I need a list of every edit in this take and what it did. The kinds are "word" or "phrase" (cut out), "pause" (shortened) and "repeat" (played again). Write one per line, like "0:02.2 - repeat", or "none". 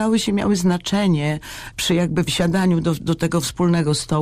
0:01.7 - word
0:02.3 - word